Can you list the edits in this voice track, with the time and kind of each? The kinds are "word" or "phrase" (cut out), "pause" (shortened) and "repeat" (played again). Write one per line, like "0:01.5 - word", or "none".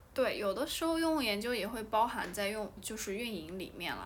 0:02.8 - word